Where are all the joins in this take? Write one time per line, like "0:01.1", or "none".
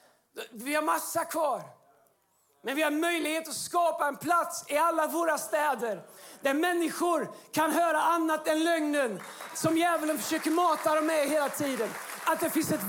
none